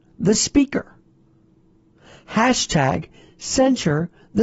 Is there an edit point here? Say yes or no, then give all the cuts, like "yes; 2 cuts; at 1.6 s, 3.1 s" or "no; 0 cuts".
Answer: no; 0 cuts